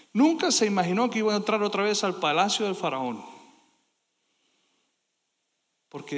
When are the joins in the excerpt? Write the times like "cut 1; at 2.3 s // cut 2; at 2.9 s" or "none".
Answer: none

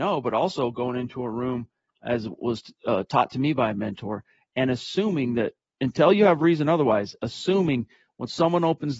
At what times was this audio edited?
none

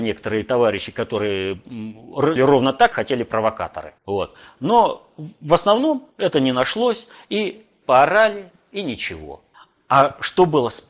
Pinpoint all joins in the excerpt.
cut 1; at 2.4 s // cut 2; at 2.9 s // cut 3; at 4.0 s // cut 4; at 6.1 s // cut 5; at 7.8 s // cut 6; at 9.5 s

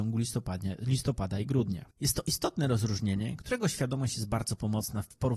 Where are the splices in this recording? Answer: cut 1; at 1.9 s

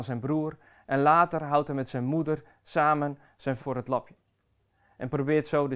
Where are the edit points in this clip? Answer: cut 1; at 3.6 s

